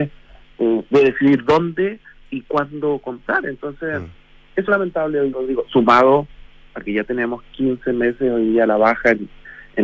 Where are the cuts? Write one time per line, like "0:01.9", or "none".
0:04.7
0:05.3